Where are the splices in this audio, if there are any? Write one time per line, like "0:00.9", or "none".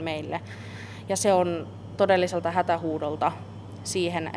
0:02.0